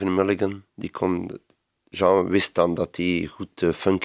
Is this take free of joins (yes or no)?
yes